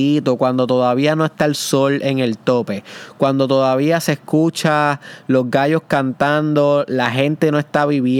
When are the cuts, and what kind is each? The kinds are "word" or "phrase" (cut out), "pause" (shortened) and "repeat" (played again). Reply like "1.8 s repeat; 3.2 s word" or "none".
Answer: none